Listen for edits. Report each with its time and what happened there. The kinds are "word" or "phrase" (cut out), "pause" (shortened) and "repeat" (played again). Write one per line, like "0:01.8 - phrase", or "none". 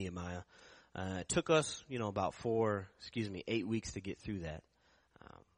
none